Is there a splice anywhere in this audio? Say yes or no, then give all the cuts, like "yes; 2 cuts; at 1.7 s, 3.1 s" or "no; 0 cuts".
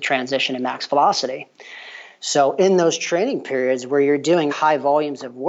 yes; 1 cut; at 4.5 s